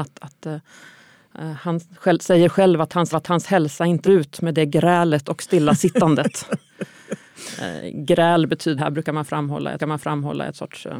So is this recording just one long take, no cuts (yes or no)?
no